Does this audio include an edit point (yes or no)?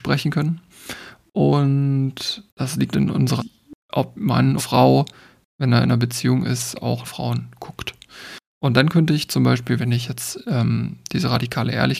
yes